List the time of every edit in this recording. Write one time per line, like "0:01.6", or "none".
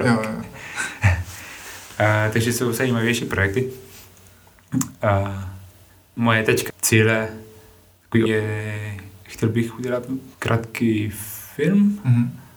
0:06.2
0:06.7
0:08.3
0:10.3